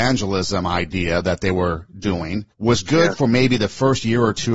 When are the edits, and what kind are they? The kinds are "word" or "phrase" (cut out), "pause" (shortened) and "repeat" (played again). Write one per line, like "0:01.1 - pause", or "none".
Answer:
0:02.5 - pause